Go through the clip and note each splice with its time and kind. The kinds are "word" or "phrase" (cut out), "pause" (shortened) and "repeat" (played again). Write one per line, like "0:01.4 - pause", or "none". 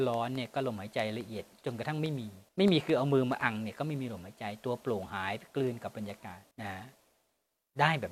0:02.5 - pause
0:06.5 - pause